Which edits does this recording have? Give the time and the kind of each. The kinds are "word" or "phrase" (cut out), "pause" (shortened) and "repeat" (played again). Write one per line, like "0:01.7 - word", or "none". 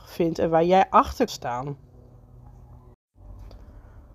0:01.3 - word